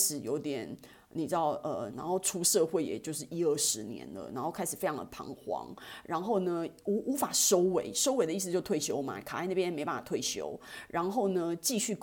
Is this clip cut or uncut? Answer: cut